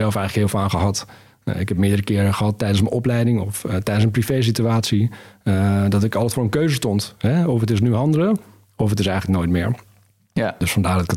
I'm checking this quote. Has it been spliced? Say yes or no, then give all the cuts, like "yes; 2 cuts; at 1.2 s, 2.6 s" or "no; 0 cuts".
no; 0 cuts